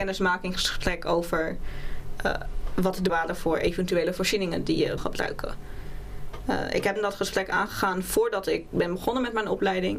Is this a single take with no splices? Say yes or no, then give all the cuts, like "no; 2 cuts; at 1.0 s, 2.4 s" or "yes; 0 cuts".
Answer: no; 3 cuts; at 3.1 s, 5.0 s, 7.0 s